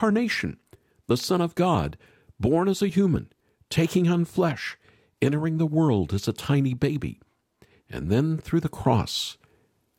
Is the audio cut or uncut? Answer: uncut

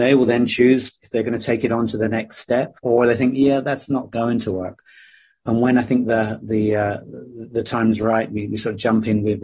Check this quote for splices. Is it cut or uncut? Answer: cut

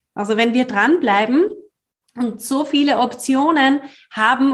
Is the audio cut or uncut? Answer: uncut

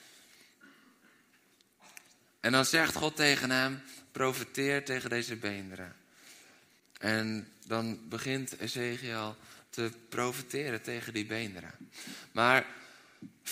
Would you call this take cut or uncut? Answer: uncut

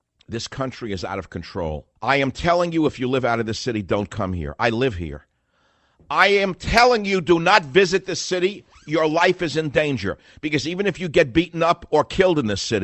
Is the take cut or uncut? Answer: cut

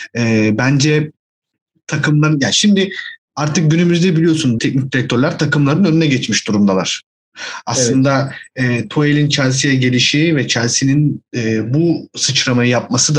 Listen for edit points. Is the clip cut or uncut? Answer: cut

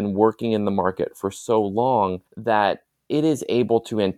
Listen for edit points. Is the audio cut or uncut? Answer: cut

